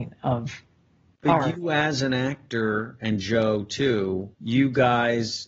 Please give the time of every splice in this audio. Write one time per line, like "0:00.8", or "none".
0:04.3